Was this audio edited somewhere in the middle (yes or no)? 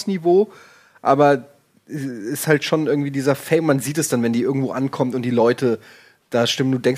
no